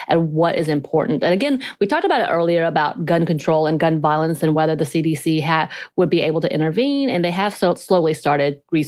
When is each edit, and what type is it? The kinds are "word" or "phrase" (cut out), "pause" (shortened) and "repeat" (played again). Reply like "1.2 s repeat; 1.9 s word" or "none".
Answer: none